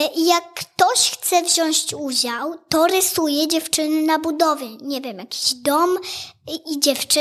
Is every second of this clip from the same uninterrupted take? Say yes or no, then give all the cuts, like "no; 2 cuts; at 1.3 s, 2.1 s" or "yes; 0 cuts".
yes; 0 cuts